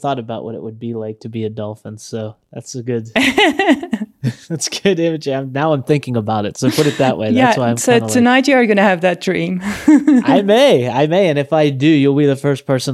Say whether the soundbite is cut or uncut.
uncut